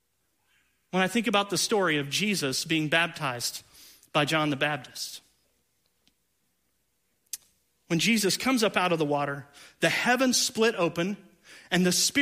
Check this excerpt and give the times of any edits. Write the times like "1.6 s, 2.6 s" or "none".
none